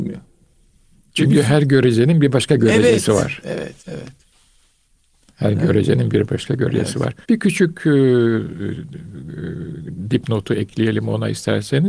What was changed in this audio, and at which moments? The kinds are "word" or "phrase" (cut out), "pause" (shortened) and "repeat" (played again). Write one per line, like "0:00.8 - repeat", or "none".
0:03.8 - pause
0:07.2 - pause